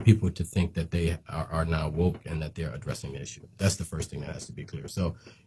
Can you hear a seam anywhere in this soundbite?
no; 0 cuts

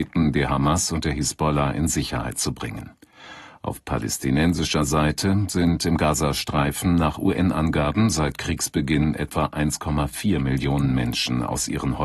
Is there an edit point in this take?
no; 0 cuts

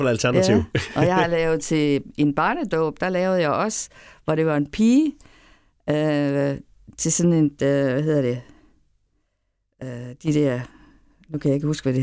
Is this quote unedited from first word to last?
yes; 0 cuts

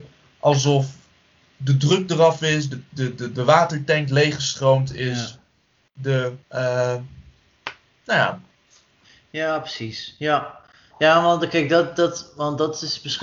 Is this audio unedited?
no; 1 cut; at 6.4 s

